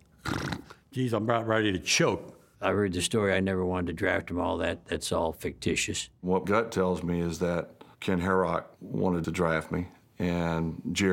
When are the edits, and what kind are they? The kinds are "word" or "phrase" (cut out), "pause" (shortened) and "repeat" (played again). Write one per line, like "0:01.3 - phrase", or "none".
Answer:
0:02.5 - pause
0:06.4 - word
0:07.9 - pause
0:08.7 - pause

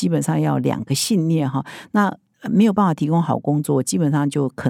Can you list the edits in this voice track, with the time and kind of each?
none

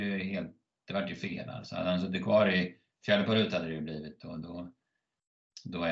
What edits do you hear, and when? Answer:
none

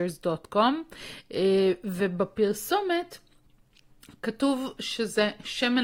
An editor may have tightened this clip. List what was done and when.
none

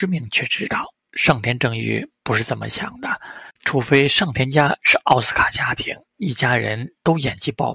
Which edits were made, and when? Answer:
0:03.6 - pause
0:06.1 - pause

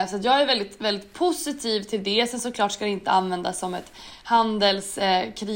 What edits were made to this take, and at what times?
none

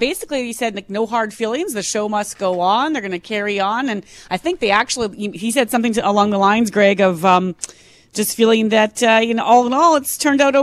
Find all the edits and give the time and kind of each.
none

